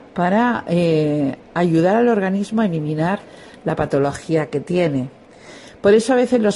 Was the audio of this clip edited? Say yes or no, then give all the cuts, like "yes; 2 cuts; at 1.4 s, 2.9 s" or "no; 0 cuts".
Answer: no; 0 cuts